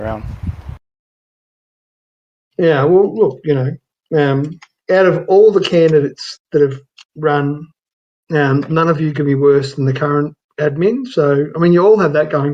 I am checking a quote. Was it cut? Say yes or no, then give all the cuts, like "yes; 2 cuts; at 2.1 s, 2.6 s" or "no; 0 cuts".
no; 0 cuts